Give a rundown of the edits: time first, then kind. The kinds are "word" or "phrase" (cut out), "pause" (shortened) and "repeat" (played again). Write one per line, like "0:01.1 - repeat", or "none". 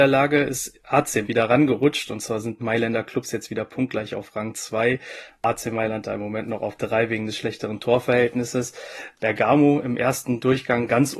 0:01.2 - word
0:02.6 - word
0:06.8 - word